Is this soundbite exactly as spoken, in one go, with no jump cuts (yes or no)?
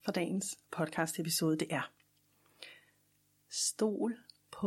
yes